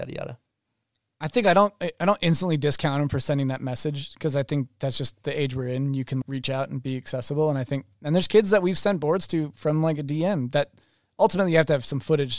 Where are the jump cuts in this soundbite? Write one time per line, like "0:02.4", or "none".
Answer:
0:06.2